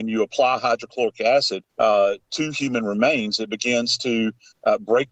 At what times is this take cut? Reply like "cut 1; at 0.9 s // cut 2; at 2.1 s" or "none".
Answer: cut 1; at 1.7 s